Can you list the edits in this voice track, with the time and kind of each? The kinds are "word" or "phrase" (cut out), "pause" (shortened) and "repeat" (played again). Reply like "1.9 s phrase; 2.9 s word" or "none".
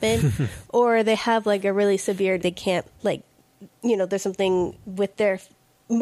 2.4 s phrase; 2.9 s pause